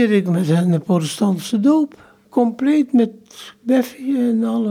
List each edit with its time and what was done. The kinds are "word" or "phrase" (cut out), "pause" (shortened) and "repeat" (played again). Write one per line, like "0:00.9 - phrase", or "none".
0:02.2 - pause